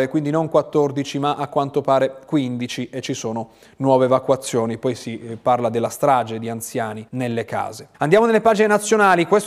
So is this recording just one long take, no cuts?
no; 2 cuts; at 7.1 s, 7.9 s

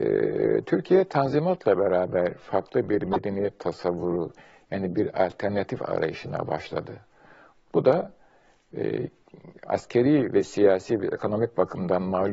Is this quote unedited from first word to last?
yes; 0 cuts

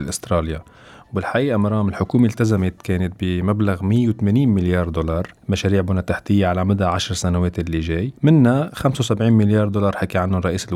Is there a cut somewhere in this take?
yes; 1 cut; at 8.2 s

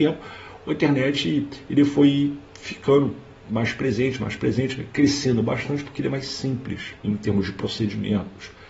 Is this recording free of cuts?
no; 1 cut; at 7.0 s

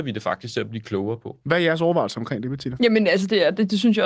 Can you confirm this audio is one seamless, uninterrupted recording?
no; 1 cut; at 1.4 s

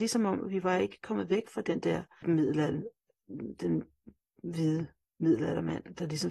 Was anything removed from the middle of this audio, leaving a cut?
yes; 1 cut; at 2.2 s

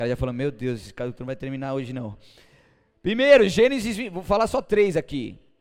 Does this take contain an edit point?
no; 0 cuts

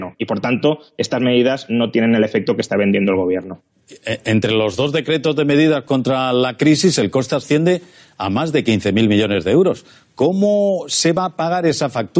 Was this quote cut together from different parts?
no; 0 cuts

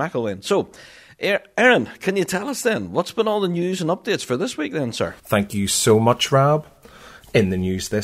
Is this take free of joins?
no; 1 cut; at 5.2 s

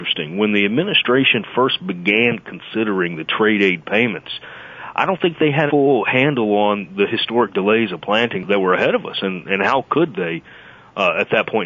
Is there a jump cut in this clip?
yes; 1 cut; at 5.7 s

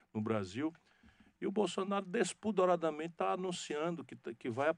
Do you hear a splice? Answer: no; 0 cuts

